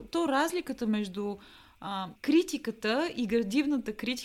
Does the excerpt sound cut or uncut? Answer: cut